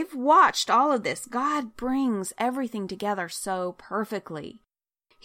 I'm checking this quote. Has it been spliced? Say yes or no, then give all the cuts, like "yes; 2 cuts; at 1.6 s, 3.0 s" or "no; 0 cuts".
no; 0 cuts